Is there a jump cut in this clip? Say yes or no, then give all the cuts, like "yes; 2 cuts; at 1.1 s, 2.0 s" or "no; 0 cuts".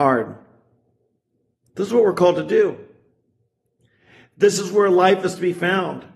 no; 0 cuts